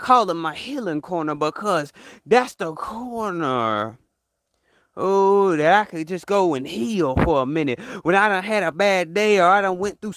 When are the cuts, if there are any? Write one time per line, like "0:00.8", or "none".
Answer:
none